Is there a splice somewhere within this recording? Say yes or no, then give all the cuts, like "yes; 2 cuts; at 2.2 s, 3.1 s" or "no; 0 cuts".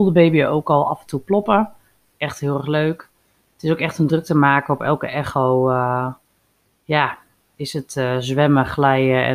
no; 0 cuts